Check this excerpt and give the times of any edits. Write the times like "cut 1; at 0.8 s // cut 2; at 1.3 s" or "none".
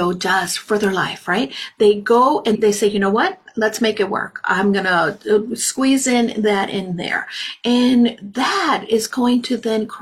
cut 1; at 2.5 s